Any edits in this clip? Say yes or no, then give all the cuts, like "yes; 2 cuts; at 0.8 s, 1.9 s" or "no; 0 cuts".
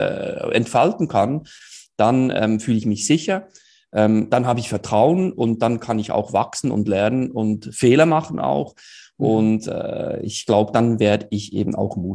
no; 0 cuts